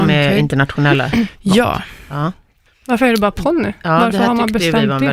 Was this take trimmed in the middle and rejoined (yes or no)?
yes